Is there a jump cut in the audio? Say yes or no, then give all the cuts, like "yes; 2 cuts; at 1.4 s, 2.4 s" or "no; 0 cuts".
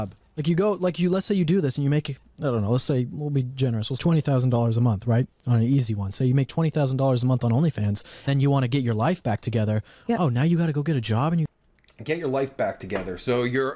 yes; 2 cuts; at 4.0 s, 8.3 s